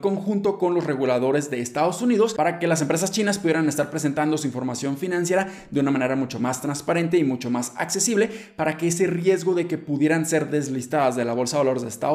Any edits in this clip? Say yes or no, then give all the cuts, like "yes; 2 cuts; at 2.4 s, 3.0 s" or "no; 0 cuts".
no; 0 cuts